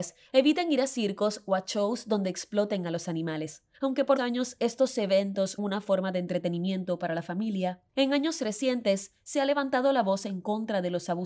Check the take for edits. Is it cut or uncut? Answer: cut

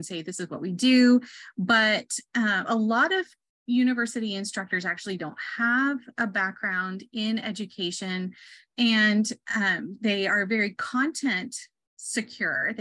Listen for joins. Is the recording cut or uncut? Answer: uncut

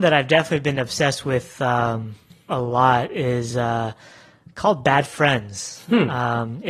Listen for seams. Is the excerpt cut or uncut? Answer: uncut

